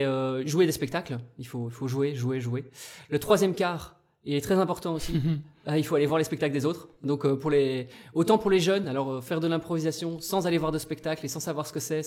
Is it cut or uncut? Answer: uncut